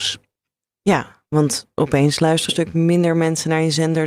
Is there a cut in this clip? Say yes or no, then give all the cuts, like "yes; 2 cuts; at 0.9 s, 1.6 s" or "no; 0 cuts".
yes; 1 cut; at 2.5 s